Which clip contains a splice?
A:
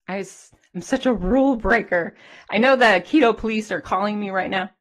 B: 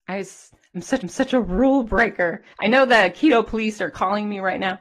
B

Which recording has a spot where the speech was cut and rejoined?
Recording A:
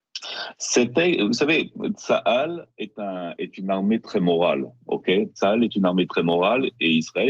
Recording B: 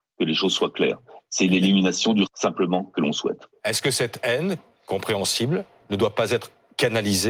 B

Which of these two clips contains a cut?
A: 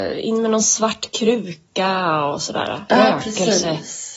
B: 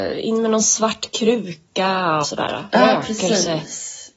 B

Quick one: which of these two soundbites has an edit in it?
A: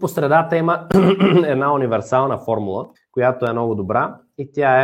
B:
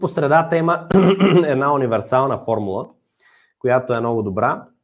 A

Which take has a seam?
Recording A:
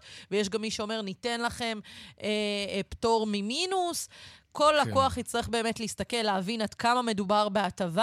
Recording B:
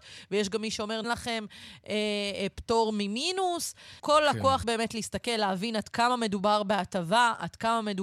B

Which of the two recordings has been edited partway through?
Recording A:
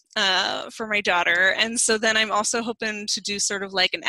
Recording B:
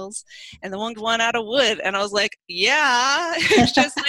B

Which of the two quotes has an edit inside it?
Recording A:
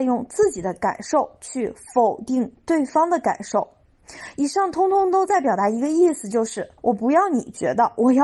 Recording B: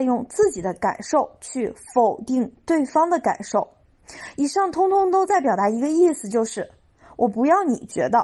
A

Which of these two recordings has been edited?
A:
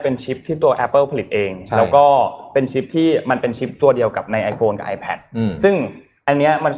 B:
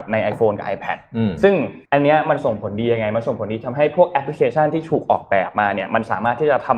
B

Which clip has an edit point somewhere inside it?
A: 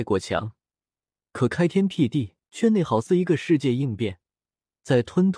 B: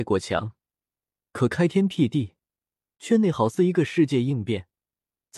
A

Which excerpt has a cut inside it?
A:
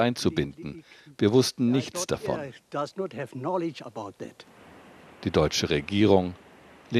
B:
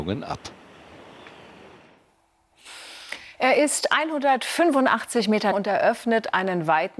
B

